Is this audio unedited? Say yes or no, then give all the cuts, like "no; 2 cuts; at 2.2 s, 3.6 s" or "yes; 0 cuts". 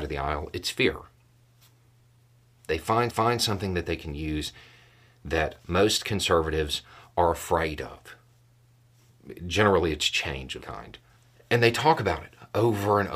no; 3 cuts; at 3.1 s, 10.6 s, 11.2 s